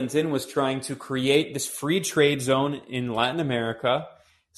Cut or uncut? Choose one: uncut